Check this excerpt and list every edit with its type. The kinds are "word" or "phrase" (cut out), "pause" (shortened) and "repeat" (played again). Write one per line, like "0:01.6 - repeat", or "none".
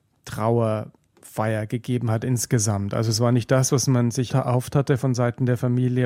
0:04.3 - word